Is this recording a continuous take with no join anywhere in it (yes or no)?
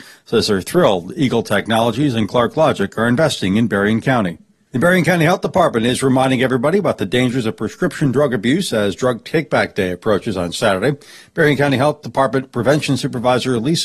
yes